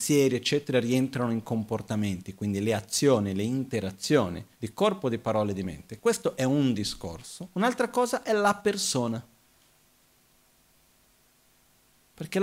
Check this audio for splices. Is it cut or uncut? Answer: cut